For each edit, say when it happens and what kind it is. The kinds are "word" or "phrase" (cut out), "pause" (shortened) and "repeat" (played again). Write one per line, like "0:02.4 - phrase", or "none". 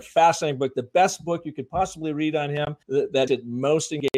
0:02.8 - pause
0:03.3 - word

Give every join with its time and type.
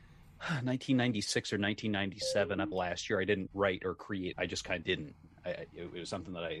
0:02.7 - word
0:03.5 - word
0:04.3 - word
0:04.8 - word

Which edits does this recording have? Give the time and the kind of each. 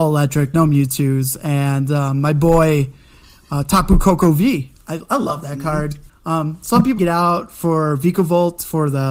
0:06.1 - pause
0:07.0 - phrase

